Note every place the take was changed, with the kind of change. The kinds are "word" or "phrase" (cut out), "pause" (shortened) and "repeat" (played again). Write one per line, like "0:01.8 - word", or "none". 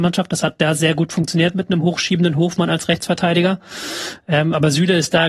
none